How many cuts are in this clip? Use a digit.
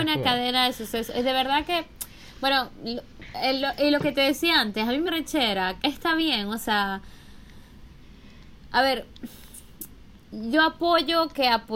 2